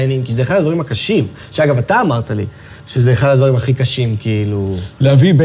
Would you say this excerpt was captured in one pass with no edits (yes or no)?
no